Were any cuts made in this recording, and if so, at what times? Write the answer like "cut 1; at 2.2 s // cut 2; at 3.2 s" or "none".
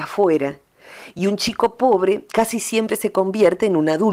none